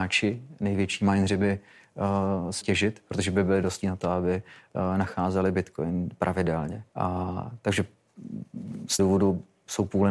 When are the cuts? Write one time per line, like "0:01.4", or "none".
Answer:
0:02.6
0:03.8
0:06.9
0:09.0